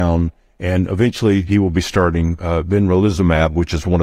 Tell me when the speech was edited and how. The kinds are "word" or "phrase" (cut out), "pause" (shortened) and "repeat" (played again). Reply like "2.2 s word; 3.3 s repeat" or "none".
none